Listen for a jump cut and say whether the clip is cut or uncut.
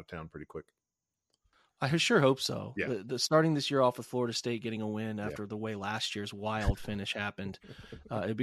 uncut